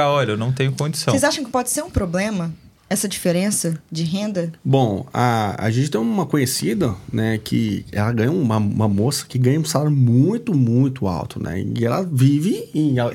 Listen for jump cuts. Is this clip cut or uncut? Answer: cut